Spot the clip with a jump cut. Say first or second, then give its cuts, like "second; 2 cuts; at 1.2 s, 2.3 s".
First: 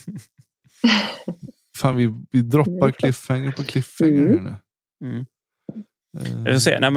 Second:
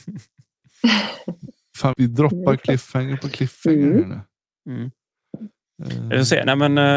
second; 1 cut; at 1.9 s